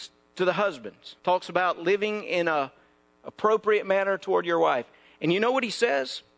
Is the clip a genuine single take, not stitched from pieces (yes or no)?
no